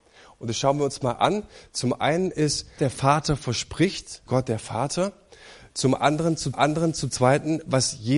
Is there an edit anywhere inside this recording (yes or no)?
yes